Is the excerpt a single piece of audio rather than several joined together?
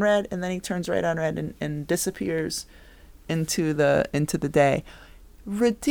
yes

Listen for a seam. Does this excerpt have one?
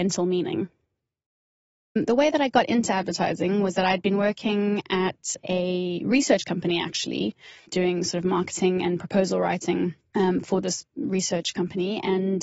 no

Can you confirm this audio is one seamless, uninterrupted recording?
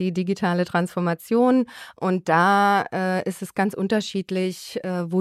yes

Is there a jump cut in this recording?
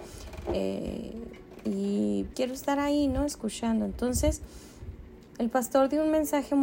yes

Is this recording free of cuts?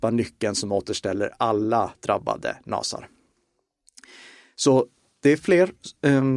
yes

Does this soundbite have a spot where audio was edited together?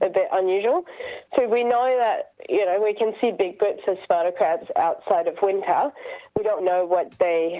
yes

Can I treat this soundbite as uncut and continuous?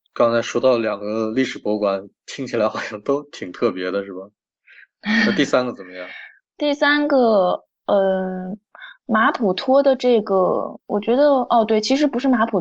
yes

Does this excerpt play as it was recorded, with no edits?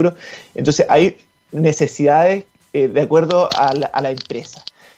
yes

